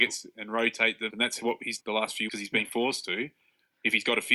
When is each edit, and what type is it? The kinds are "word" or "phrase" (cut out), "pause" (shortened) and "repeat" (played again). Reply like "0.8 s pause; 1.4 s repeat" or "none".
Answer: 1.1 s word; 1.8 s word; 2.3 s word

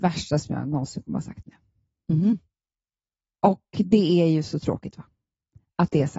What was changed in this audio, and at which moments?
none

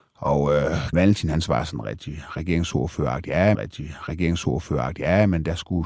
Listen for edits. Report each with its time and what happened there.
0.9 s word; 3.5 s repeat

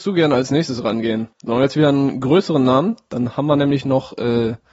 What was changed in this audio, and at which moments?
1.3 s pause

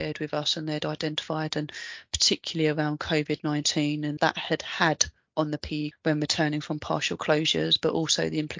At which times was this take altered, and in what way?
4.2 s phrase; 5.9 s word

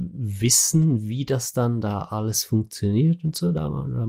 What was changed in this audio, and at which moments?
none

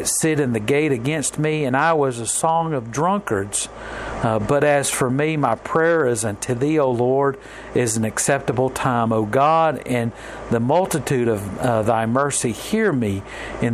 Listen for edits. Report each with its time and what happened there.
none

